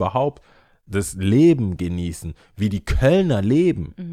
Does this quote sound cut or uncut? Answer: uncut